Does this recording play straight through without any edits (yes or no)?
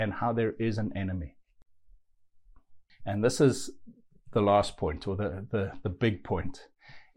yes